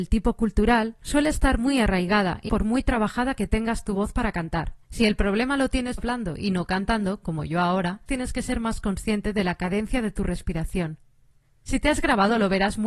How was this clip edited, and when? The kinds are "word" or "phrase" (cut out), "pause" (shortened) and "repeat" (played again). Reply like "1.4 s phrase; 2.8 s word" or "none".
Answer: 2.5 s phrase; 4.8 s pause; 6.0 s word; 8.1 s word

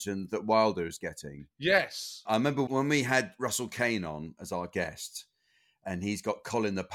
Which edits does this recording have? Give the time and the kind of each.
none

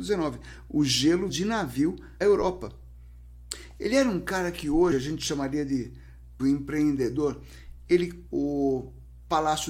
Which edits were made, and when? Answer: 1.3 s word; 2.2 s word; 6.4 s word; 8.3 s word

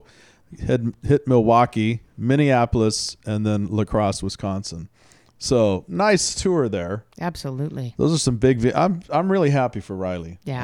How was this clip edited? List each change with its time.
none

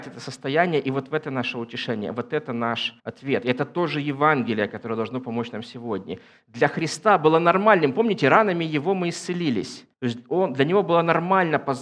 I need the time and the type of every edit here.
3.0 s pause; 9.9 s pause

